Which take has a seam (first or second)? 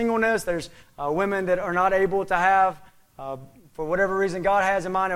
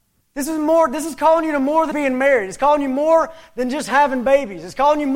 second